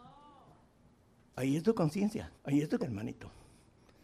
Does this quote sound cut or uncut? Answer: cut